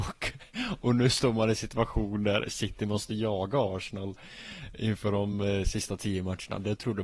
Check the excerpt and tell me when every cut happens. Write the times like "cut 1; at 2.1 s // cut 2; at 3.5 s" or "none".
none